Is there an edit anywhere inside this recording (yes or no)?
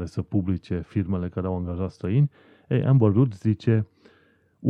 no